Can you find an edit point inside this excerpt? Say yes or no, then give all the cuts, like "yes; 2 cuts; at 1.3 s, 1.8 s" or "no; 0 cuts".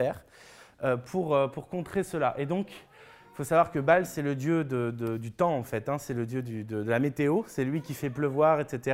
no; 0 cuts